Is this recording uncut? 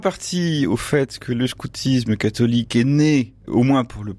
yes; 0 cuts

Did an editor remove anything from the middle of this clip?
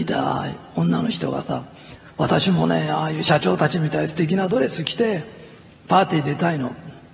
yes; 1 cut; at 5.7 s

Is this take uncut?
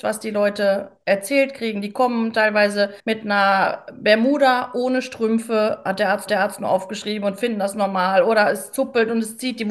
no; 2 cuts; at 3.0 s, 6.3 s

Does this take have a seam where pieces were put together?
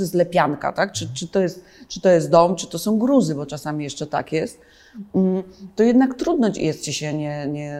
no; 0 cuts

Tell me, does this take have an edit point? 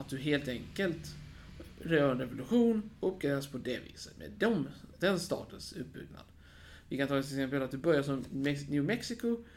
no; 0 cuts

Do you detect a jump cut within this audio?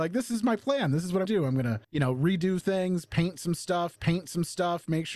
yes; 4 cuts; at 1.2 s, 1.8 s, 2.6 s, 4.0 s

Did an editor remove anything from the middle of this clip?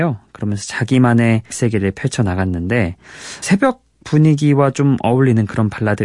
yes; 2 cuts; at 1.5 s, 3.4 s

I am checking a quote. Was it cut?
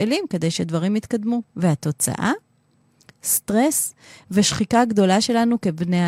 yes; 1 cut; at 1.5 s

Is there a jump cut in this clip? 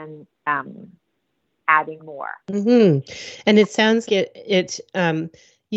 yes; 3 cuts; at 2.0 s, 2.4 s, 4.1 s

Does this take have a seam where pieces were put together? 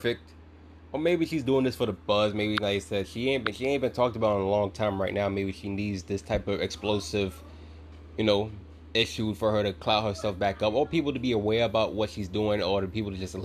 no; 0 cuts

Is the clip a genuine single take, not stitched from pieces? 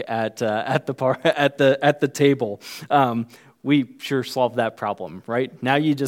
yes; 0 cuts

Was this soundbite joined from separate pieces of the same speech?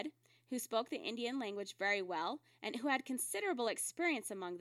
no; 0 cuts

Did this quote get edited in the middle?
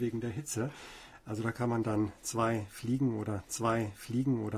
yes; 1 cut; at 3.4 s

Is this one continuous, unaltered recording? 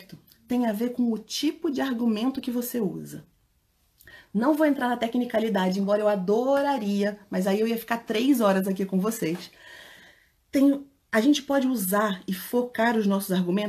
yes; 0 cuts

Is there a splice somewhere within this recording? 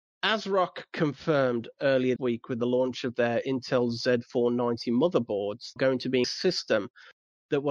yes; 3 cuts; at 2.2 s, 5.8 s, 6.2 s

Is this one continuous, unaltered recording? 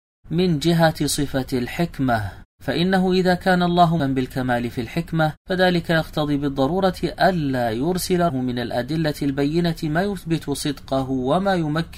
no; 4 cuts; at 2.5 s, 4.0 s, 5.4 s, 8.3 s

